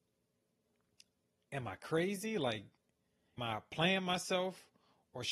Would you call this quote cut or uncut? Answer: cut